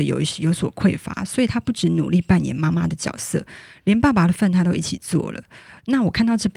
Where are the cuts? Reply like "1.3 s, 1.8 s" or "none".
none